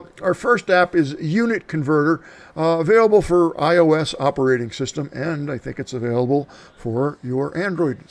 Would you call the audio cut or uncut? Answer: uncut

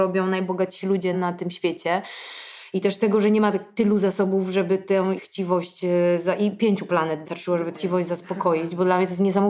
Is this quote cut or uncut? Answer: cut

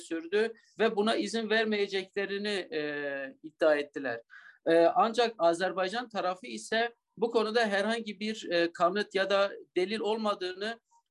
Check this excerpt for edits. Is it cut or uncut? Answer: uncut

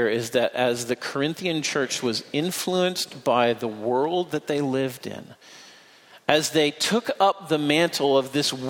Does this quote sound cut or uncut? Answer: uncut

